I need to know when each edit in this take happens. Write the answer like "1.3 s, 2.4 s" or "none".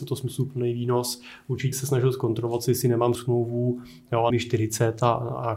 1.7 s, 3.2 s, 4.3 s